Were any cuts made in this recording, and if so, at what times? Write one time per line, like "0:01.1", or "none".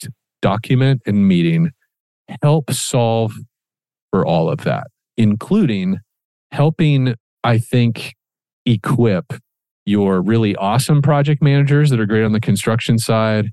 none